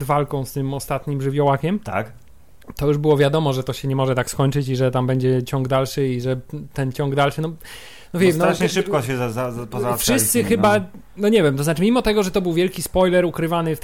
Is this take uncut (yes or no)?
yes